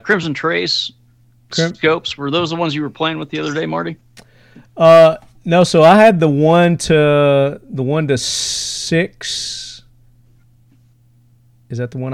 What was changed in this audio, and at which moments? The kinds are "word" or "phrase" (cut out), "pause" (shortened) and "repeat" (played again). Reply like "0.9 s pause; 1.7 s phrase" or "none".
none